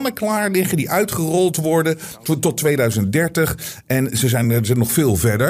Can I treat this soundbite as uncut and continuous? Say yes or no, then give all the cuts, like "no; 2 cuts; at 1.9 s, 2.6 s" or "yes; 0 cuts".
yes; 0 cuts